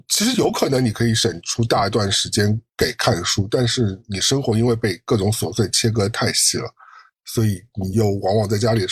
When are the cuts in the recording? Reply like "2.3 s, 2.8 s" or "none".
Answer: none